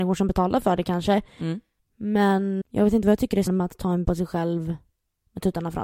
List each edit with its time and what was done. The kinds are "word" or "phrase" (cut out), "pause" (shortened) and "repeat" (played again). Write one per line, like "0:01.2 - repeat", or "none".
0:02.6 - word
0:03.5 - word
0:04.0 - word